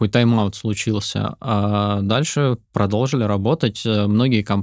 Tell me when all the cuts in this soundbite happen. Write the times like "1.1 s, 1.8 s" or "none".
2.6 s